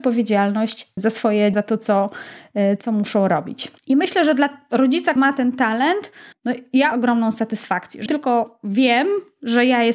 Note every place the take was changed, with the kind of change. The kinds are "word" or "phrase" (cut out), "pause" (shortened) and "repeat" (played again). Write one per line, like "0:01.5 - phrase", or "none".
0:01.0 - word
0:01.5 - word
0:03.8 - pause
0:05.2 - word
0:06.3 - pause
0:06.9 - phrase
0:08.1 - word